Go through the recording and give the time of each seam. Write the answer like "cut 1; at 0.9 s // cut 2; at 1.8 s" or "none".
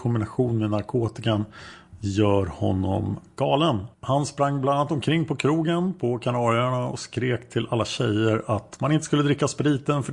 cut 1; at 3.9 s

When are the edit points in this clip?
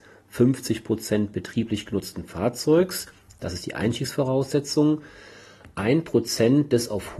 none

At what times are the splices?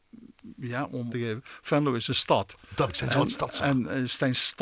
cut 1; at 1.1 s // cut 2; at 2.9 s

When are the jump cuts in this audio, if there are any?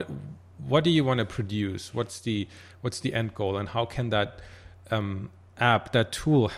none

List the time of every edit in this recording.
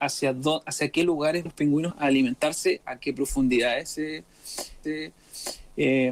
cut 1; at 1.5 s // cut 2; at 1.9 s // cut 3; at 4.8 s

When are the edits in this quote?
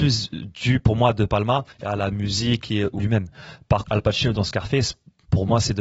cut 1; at 1.7 s // cut 2; at 3.0 s // cut 3; at 3.8 s

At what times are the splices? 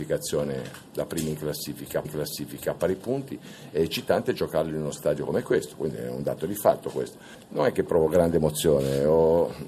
cut 1; at 2.0 s

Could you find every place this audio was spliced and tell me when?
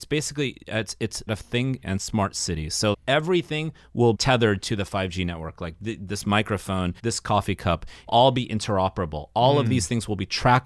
cut 1; at 1.3 s // cut 2; at 1.8 s // cut 3; at 2.9 s // cut 4; at 4.1 s // cut 5; at 7.0 s // cut 6; at 8.1 s

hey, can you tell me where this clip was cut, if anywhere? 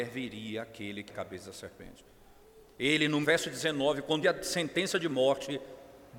cut 1; at 1.1 s // cut 2; at 3.2 s // cut 3; at 4.2 s

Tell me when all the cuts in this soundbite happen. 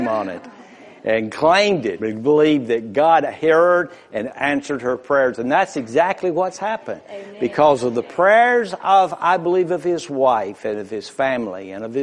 cut 1; at 2.0 s

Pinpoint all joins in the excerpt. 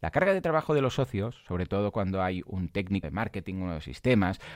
cut 1; at 3.0 s

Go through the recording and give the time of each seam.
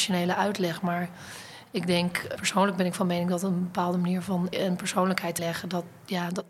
cut 1; at 2.4 s // cut 2; at 4.5 s // cut 3; at 5.4 s

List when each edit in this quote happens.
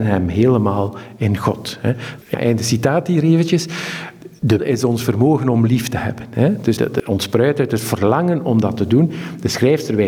cut 1; at 4.6 s // cut 2; at 6.8 s

